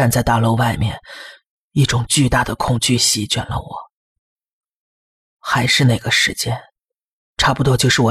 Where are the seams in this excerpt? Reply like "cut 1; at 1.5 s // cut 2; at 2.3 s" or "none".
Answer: none